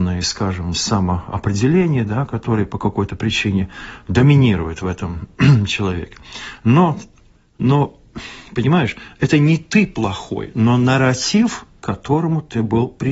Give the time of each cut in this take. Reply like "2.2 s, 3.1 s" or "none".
7.4 s